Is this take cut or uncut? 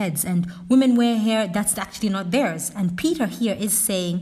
uncut